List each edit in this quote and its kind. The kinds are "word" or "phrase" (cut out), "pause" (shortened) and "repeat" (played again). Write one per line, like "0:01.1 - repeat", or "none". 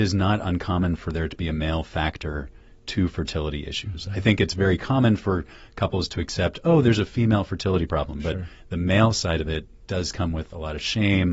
none